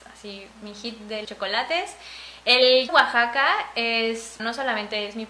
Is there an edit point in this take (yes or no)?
yes